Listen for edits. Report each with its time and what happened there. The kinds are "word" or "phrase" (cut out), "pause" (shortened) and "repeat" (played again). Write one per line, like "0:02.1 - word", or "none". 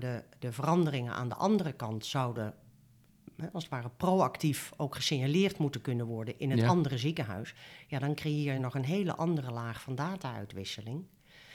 none